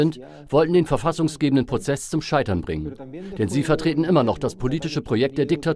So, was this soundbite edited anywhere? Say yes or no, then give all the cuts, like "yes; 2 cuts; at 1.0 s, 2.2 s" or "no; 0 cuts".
no; 0 cuts